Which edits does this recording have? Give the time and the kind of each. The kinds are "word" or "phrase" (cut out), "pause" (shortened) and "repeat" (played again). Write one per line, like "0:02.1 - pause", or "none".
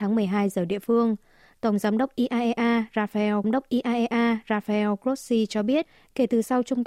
0:03.4 - repeat